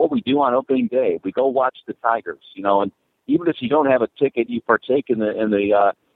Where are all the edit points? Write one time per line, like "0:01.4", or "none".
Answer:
none